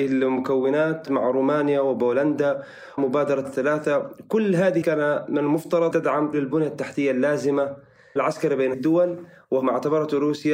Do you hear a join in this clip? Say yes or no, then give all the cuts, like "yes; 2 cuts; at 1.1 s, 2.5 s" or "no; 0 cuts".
yes; 8 cuts; at 1.1 s, 3.0 s, 3.4 s, 4.8 s, 5.9 s, 6.3 s, 8.2 s, 8.7 s